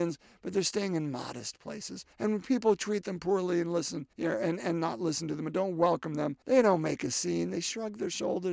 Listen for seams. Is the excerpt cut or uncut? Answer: cut